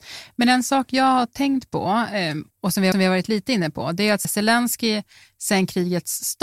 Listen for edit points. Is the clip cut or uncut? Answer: cut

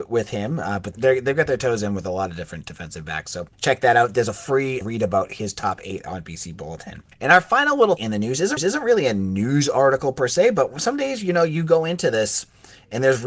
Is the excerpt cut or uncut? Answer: cut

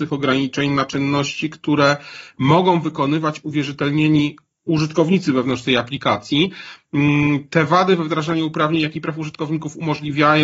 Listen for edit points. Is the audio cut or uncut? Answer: uncut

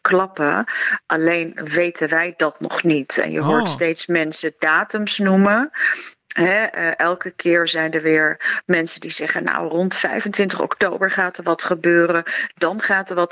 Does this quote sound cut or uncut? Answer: uncut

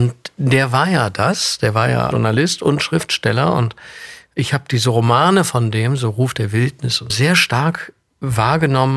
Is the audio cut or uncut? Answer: cut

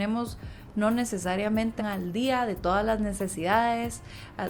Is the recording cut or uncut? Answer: cut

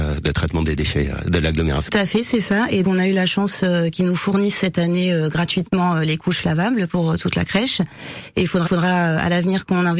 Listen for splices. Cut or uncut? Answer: cut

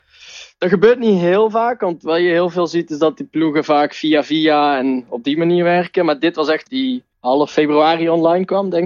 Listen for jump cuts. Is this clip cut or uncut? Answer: cut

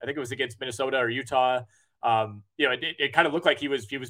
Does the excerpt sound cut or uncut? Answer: uncut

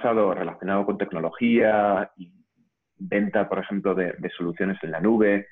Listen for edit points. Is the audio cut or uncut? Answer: uncut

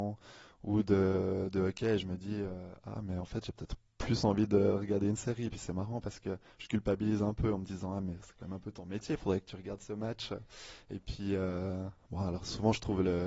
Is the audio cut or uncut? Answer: uncut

